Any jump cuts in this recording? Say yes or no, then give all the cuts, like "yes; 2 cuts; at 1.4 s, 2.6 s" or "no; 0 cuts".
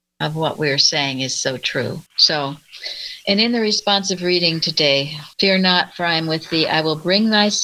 yes; 2 cuts; at 2.1 s, 5.3 s